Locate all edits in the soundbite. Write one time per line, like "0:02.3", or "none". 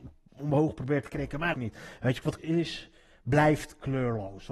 0:01.5
0:02.4